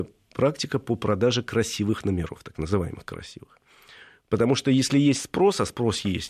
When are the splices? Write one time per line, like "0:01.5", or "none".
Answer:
none